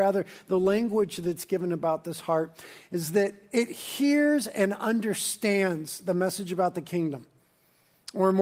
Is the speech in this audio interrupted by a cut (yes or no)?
no